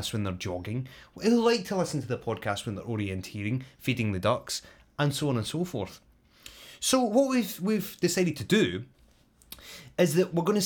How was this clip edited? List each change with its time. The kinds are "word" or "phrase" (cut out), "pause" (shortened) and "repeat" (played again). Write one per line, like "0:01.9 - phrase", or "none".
none